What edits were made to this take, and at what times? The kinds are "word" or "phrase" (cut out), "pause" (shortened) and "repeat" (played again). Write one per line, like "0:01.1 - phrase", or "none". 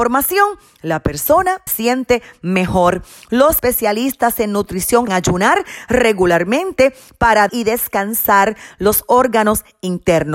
0:01.7 - word
0:03.6 - word
0:05.1 - word
0:07.5 - word